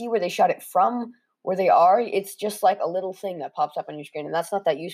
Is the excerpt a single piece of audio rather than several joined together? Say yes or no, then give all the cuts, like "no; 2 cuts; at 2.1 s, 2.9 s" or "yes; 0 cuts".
yes; 0 cuts